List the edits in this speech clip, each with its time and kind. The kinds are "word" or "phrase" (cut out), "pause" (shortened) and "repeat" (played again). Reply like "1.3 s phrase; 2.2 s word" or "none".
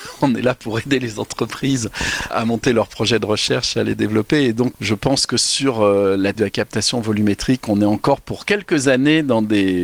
2.3 s word; 4.7 s word; 6.4 s word